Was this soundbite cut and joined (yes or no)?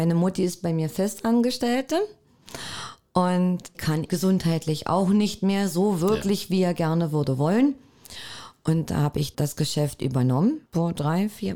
yes